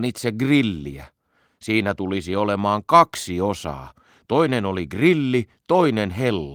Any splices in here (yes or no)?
no